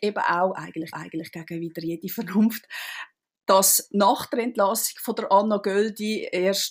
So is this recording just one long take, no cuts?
no; 1 cut; at 0.9 s

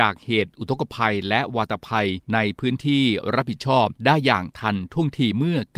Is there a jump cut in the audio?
yes; 2 cuts; at 2.2 s, 4.0 s

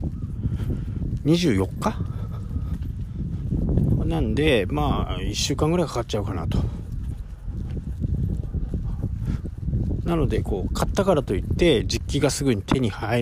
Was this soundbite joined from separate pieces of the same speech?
no; 0 cuts

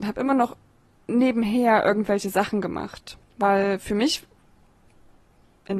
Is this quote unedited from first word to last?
no; 1 cut; at 3.2 s

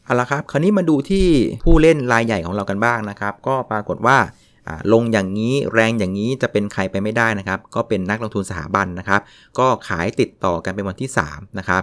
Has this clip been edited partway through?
no; 0 cuts

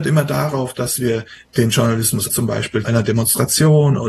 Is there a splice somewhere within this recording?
yes; 2 cuts; at 2.3 s, 2.8 s

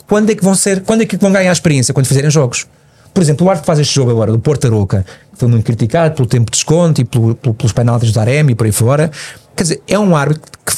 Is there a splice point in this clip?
yes; 1 cut; at 9.5 s

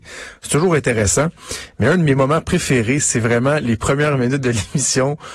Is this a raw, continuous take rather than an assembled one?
yes; 0 cuts

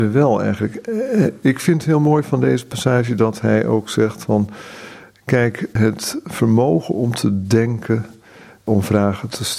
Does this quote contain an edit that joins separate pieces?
no; 0 cuts

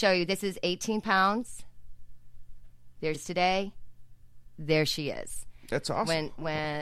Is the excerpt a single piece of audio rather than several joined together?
no; 1 cut; at 3.1 s

